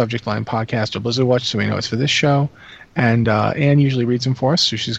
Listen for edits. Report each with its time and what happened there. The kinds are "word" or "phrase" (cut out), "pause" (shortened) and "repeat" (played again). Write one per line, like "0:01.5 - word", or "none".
none